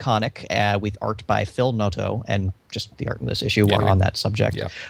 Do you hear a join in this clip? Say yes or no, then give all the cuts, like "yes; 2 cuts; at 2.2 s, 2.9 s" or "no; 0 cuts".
yes; 2 cuts; at 3.0 s, 3.8 s